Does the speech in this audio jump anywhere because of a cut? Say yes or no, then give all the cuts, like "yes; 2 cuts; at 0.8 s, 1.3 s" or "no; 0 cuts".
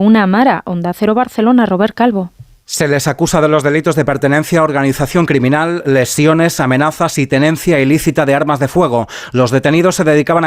no; 0 cuts